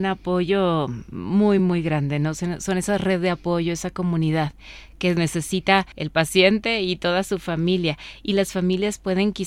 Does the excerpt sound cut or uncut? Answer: uncut